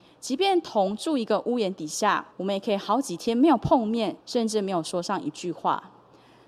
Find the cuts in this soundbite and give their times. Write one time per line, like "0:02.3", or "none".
0:02.3
0:04.2